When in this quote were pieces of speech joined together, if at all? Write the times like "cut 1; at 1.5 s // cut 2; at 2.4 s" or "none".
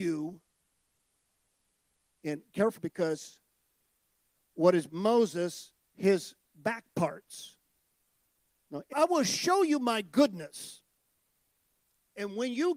cut 1; at 2.8 s // cut 2; at 4.9 s // cut 3; at 5.8 s // cut 4; at 8.4 s // cut 5; at 8.9 s